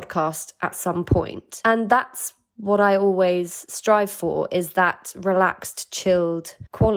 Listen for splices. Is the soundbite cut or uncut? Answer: uncut